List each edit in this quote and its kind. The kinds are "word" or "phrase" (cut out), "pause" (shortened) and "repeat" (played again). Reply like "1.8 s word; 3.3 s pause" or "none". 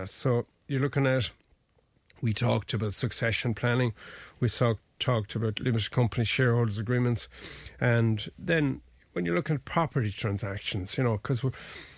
none